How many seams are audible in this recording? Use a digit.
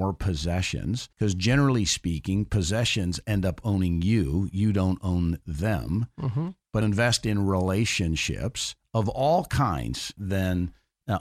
3